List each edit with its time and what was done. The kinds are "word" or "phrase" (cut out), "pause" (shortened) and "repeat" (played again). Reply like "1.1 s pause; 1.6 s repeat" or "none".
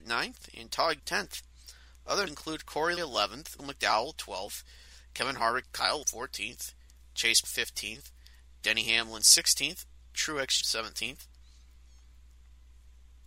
1.0 s word; 2.3 s word; 3.0 s word; 3.6 s word; 5.6 s word; 6.0 s word; 7.4 s word; 10.1 s word; 10.6 s word